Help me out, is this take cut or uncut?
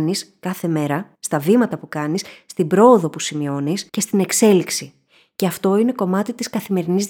cut